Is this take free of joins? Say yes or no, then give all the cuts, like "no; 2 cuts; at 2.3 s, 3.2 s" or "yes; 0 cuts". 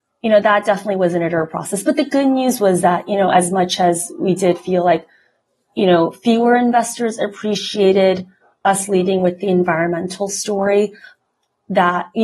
yes; 0 cuts